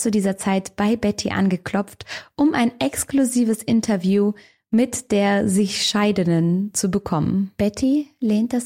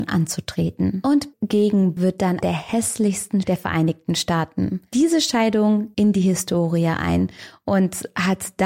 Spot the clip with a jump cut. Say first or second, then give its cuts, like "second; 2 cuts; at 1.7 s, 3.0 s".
second; 5 cuts; at 1.3 s, 2.0 s, 2.4 s, 3.4 s, 5.9 s